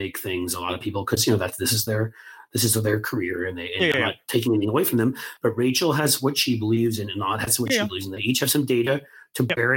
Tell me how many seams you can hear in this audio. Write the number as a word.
zero